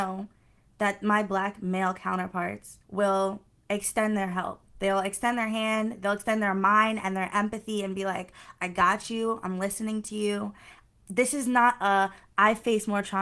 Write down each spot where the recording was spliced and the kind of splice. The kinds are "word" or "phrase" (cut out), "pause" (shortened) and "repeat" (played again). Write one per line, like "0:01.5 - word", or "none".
0:02.8 - pause

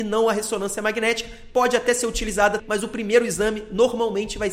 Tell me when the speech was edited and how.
0:02.6 - word

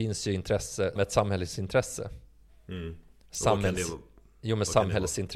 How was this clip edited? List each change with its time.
0:01.0 - word

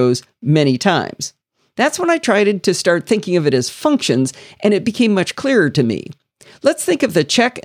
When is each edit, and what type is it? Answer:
none

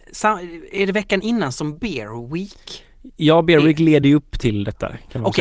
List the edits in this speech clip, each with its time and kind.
none

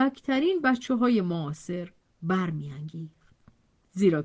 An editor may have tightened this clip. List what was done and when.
none

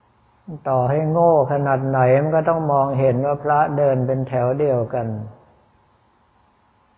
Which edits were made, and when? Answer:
none

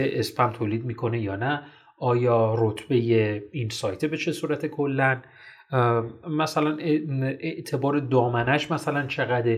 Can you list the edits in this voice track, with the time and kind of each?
none

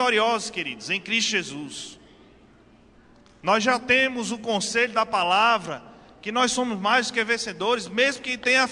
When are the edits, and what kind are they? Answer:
none

